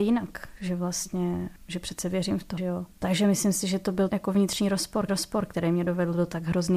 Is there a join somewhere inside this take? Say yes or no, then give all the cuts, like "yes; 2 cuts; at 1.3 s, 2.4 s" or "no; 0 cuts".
yes; 5 cuts; at 1.6 s, 2.6 s, 2.9 s, 4.1 s, 5.1 s